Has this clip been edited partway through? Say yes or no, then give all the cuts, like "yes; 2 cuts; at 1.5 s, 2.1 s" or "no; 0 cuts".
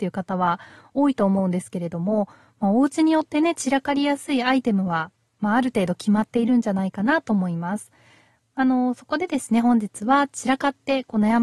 no; 0 cuts